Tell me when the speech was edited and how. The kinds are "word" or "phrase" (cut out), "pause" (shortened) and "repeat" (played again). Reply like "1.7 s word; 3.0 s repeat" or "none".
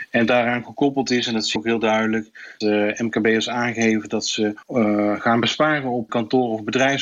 1.6 s word; 2.6 s word; 4.6 s pause; 6.1 s word